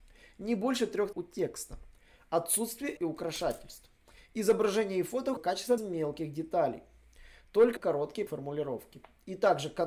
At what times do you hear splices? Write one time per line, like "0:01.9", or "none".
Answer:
0:01.1
0:03.0
0:05.4
0:05.8
0:07.8
0:08.3